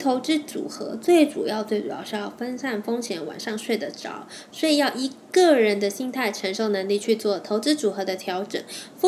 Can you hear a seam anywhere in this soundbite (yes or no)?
no